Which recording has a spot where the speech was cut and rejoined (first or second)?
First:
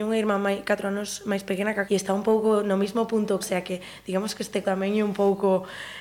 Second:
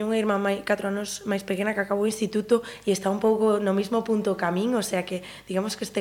first